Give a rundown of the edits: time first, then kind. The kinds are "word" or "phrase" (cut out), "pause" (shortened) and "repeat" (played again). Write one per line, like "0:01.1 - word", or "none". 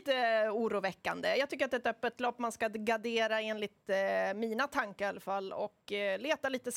none